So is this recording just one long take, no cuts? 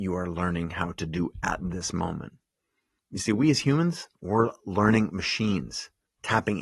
yes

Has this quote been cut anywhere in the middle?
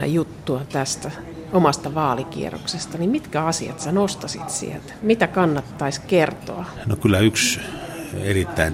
no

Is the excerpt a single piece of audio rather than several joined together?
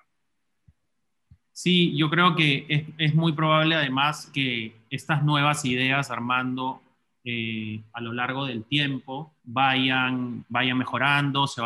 no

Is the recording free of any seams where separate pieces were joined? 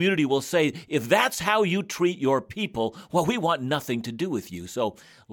yes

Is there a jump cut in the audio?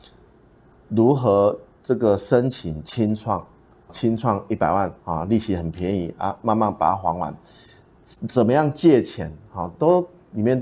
yes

